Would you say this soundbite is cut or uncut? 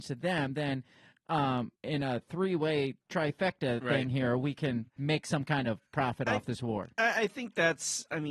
cut